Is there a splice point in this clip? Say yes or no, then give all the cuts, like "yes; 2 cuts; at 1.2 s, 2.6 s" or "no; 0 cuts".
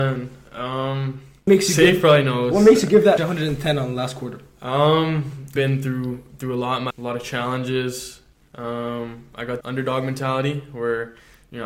yes; 5 cuts; at 1.5 s, 3.2 s, 5.6 s, 6.9 s, 9.6 s